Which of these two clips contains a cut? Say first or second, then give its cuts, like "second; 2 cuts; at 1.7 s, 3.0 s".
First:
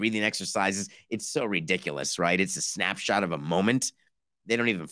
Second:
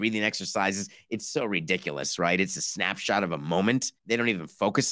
second; 1 cut; at 4.0 s